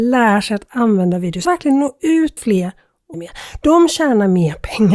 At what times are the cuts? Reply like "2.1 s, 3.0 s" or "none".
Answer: 1.4 s, 2.4 s, 3.1 s